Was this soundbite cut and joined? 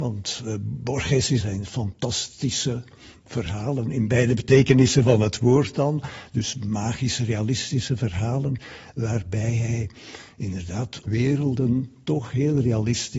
yes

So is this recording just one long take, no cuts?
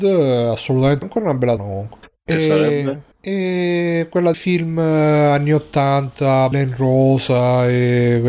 no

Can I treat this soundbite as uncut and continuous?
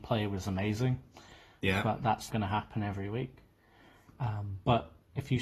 no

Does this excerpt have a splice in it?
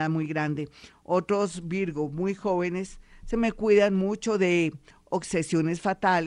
no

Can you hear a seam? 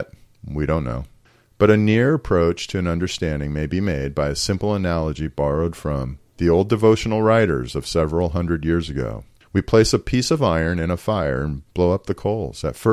yes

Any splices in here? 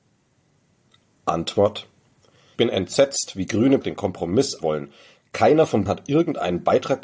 yes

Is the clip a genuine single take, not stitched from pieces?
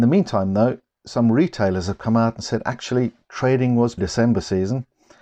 no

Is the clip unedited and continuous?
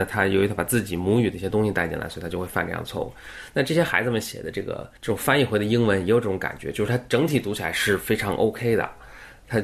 no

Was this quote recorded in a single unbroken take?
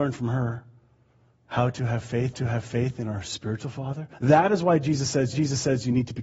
no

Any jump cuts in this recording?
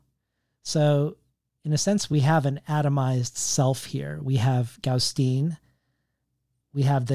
no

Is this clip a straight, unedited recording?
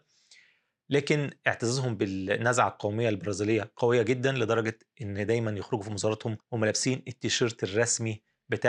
no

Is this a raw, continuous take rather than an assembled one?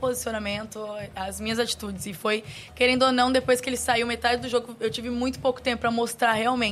yes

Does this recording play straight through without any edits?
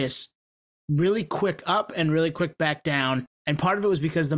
no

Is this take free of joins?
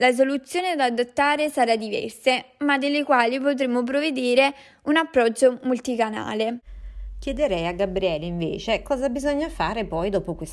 yes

